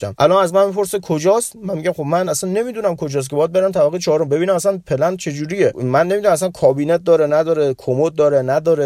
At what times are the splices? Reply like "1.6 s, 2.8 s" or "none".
none